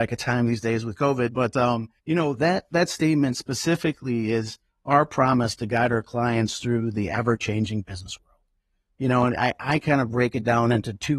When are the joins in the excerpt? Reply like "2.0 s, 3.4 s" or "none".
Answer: 2.0 s